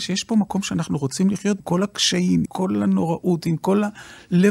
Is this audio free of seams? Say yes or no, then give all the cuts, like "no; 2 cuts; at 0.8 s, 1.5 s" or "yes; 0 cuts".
no; 2 cuts; at 1.6 s, 2.4 s